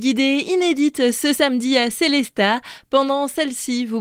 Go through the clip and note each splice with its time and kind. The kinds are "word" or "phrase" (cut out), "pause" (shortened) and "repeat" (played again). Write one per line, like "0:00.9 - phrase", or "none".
none

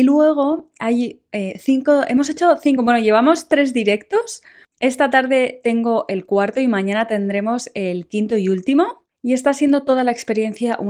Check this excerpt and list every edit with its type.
none

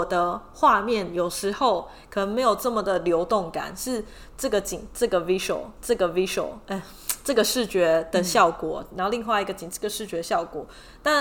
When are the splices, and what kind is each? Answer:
0:05.8 - repeat

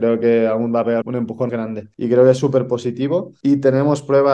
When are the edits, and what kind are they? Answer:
0:01.0 - word
0:01.5 - word

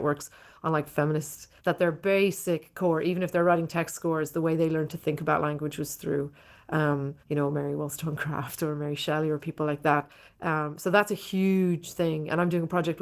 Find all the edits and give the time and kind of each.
0:01.6 - pause
0:07.2 - pause
0:10.3 - pause

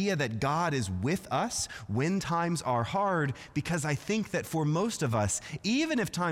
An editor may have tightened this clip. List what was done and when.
none

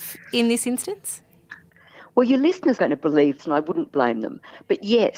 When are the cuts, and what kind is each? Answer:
0:02.8 - word
0:03.4 - word

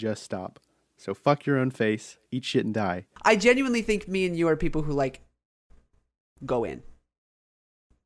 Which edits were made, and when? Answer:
0:02.3 - pause

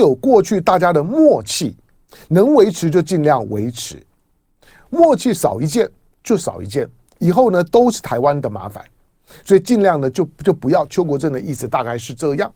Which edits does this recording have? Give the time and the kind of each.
none

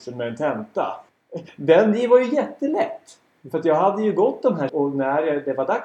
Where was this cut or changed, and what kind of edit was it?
0:01.1 - pause
0:04.7 - word

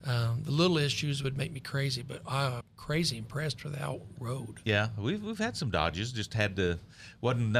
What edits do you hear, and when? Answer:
0:02.6 - word

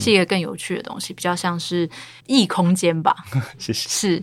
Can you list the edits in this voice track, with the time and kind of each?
0:02.2 - pause

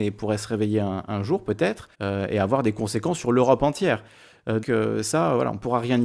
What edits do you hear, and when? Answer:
0:01.9 - pause
0:04.6 - word

